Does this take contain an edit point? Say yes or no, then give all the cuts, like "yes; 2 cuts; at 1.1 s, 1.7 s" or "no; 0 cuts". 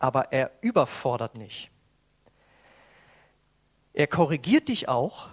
yes; 1 cut; at 1.3 s